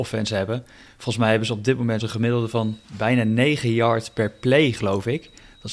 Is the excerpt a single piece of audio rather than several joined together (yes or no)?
no